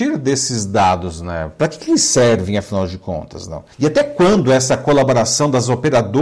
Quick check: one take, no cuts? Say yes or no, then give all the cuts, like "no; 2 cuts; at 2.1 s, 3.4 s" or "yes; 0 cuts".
no; 1 cut; at 3.7 s